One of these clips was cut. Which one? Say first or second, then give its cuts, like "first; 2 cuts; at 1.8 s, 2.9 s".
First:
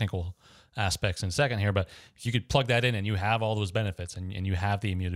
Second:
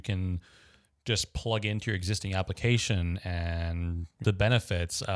second; 1 cut; at 4.2 s